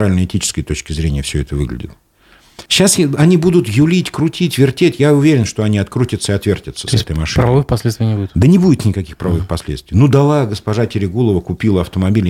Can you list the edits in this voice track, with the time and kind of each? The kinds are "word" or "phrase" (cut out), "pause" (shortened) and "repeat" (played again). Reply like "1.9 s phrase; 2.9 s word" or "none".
2.7 s pause